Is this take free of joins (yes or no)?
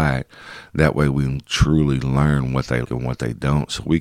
no